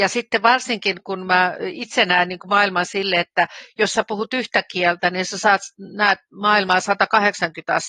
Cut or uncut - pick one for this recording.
uncut